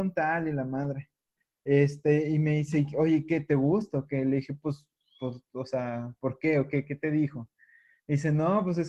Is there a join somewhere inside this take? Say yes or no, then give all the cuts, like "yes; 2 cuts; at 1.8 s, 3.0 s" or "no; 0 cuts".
no; 0 cuts